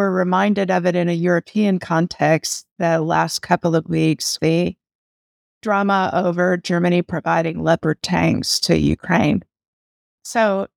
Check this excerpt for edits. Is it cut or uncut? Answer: cut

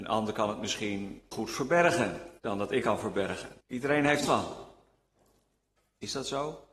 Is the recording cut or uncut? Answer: cut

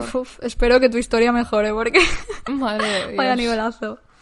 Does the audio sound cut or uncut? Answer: uncut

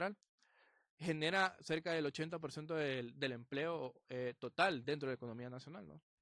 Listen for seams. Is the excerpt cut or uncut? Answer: uncut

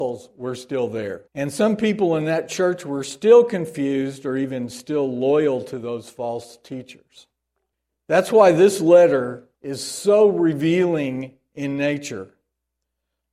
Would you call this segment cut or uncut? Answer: cut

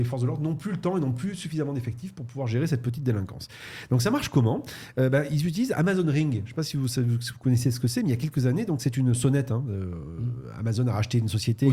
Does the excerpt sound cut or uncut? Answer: uncut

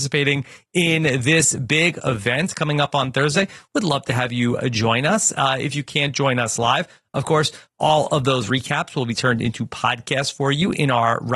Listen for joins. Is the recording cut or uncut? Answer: uncut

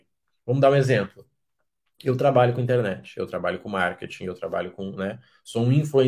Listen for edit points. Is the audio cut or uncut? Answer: uncut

